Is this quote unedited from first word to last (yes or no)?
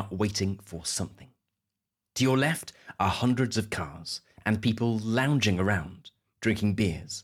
yes